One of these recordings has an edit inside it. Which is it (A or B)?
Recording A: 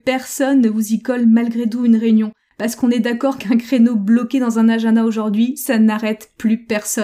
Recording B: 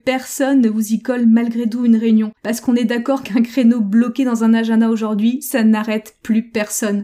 B